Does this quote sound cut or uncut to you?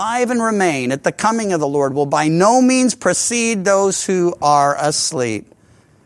uncut